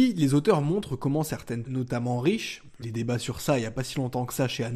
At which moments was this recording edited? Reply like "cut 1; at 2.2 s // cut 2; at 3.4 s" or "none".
cut 1; at 1.6 s // cut 2; at 2.8 s

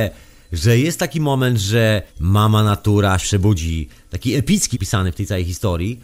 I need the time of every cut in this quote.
cut 1; at 2.1 s // cut 2; at 3.2 s // cut 3; at 4.7 s

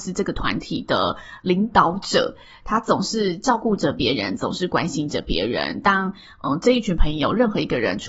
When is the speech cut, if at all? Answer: none

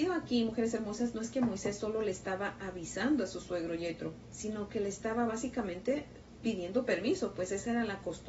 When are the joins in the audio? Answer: none

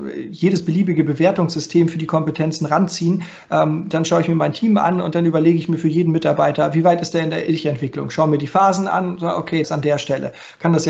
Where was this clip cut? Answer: cut 1; at 9.6 s

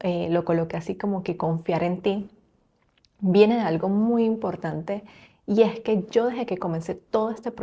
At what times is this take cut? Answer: none

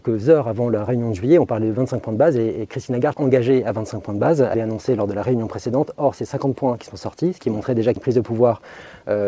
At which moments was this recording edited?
cut 1; at 3.1 s // cut 2; at 4.5 s // cut 3; at 8.0 s

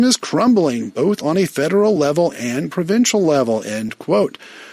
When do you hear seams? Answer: none

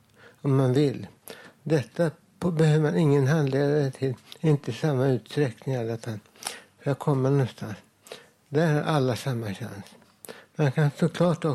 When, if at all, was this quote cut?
none

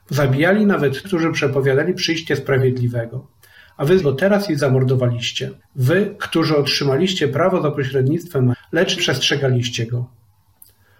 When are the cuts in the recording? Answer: cut 1; at 1.0 s // cut 2; at 4.0 s // cut 3; at 5.6 s // cut 4; at 8.5 s // cut 5; at 9.0 s

